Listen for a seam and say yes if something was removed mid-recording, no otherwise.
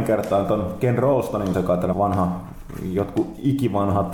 yes